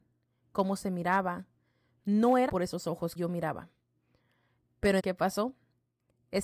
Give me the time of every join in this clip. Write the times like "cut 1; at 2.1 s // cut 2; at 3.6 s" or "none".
cut 1; at 2.5 s // cut 2; at 3.2 s // cut 3; at 5.0 s